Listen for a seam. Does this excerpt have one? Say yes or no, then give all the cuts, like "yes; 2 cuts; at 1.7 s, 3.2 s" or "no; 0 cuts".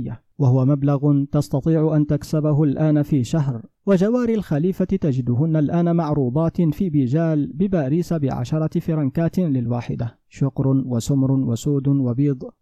yes; 2 cuts; at 3.7 s, 10.2 s